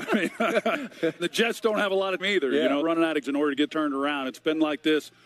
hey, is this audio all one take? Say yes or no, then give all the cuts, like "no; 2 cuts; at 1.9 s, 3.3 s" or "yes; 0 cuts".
no; 5 cuts; at 1.2 s, 2.2 s, 2.8 s, 3.2 s, 3.7 s